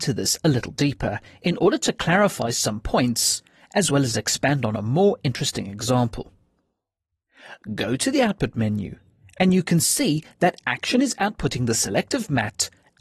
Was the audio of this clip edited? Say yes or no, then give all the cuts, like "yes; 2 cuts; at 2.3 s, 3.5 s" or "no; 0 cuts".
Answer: no; 0 cuts